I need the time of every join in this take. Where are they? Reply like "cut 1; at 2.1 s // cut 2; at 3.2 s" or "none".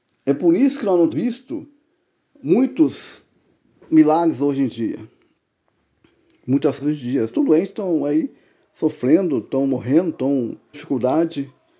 cut 1; at 1.1 s // cut 2; at 6.8 s // cut 3; at 7.3 s // cut 4; at 10.7 s